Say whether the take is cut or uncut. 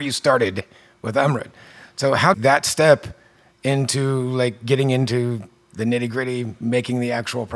cut